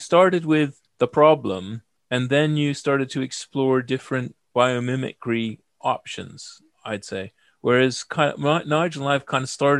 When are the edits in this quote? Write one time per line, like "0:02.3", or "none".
none